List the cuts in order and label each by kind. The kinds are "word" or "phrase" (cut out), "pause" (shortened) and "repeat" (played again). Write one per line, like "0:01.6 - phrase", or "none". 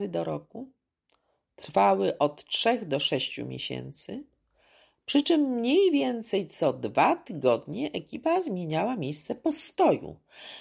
none